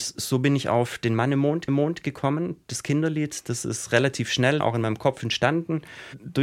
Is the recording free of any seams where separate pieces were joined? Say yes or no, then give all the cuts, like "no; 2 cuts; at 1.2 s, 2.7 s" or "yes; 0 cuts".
no; 2 cuts; at 1.7 s, 4.6 s